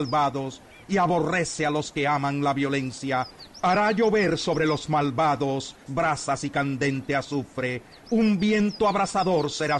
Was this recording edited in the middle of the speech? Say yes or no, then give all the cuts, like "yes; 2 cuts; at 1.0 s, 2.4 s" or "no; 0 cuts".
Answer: yes; 1 cut; at 5.9 s